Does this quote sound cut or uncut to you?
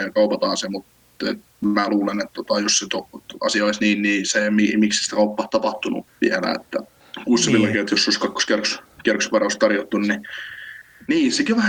uncut